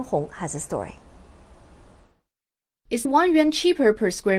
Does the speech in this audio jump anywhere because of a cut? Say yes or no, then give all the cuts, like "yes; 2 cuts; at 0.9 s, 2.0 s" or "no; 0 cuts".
yes; 1 cut; at 3.0 s